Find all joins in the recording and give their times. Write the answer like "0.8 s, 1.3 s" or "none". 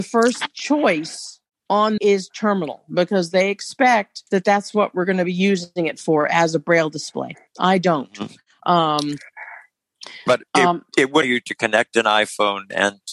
2.0 s, 4.3 s, 10.3 s, 11.2 s